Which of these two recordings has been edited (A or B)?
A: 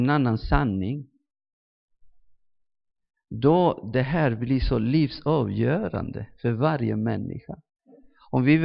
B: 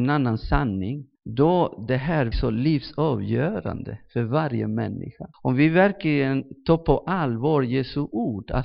B